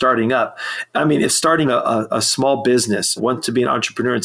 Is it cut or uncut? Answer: cut